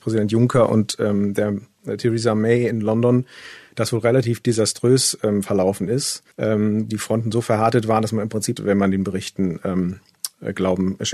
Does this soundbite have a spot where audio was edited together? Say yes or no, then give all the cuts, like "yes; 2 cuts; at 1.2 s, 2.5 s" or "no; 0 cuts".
yes; 3 cuts; at 6.3 s, 6.9 s, 8.6 s